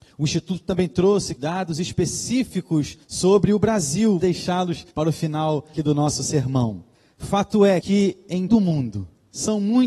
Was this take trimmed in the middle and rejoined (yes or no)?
yes